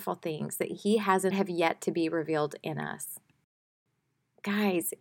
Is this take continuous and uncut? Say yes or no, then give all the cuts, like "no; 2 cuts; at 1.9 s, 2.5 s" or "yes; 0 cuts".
no; 1 cut; at 1.3 s